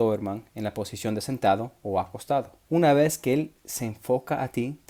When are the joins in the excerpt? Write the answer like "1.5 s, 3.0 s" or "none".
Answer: 2.7 s